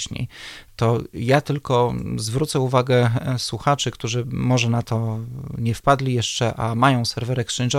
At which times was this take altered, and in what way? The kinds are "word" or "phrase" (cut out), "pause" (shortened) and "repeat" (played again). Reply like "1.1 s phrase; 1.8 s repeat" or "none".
none